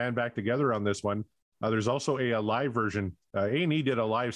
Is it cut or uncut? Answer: uncut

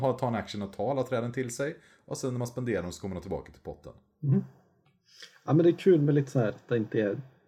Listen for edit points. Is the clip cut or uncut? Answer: uncut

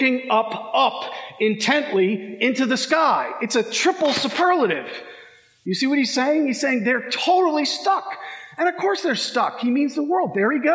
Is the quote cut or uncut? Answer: uncut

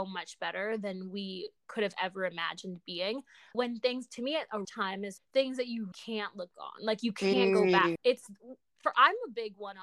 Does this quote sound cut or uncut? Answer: cut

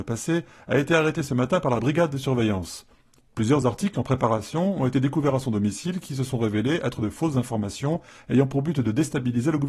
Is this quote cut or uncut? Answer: uncut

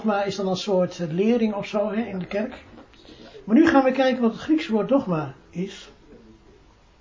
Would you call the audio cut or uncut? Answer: uncut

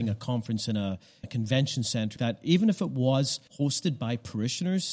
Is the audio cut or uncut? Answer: cut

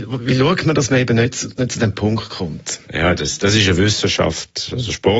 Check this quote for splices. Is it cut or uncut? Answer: cut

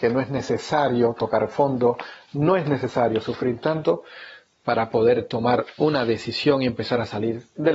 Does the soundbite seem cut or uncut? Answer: uncut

